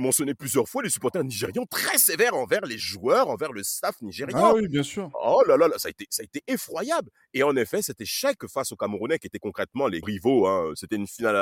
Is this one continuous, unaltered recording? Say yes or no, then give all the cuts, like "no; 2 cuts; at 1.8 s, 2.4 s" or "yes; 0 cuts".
no; 1 cut; at 10.0 s